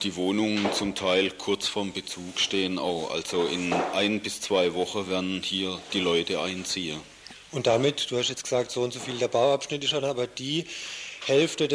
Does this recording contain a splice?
no; 0 cuts

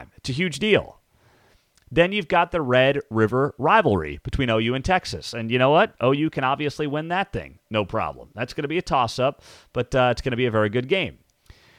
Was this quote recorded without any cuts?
yes; 0 cuts

